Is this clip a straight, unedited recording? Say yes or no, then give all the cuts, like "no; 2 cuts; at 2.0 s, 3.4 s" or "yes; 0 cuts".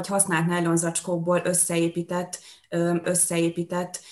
no; 1 cut; at 3.0 s